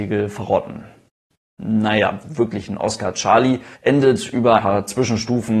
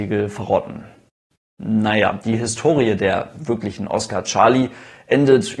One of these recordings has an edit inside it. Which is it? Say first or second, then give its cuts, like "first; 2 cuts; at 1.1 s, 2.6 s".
first; 3 cuts; at 2.2 s, 3.7 s, 4.6 s